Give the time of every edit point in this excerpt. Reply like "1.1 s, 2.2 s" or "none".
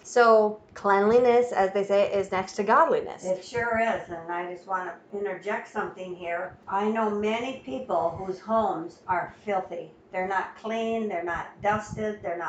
none